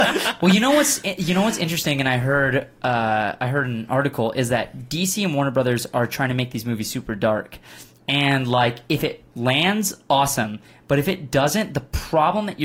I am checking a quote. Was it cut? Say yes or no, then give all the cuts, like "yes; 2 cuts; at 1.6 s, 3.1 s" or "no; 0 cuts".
no; 0 cuts